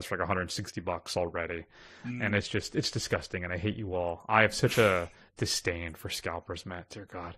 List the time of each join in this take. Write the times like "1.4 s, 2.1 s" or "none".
none